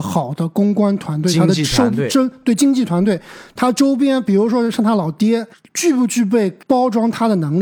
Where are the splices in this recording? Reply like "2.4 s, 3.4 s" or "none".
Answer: 5.5 s, 6.6 s